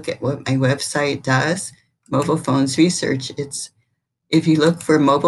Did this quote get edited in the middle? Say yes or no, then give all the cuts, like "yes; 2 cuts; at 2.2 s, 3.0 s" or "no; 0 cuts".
no; 0 cuts